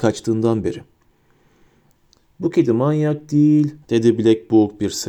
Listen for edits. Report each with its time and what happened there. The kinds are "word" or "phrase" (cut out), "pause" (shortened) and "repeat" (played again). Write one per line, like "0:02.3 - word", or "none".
0:03.8 - pause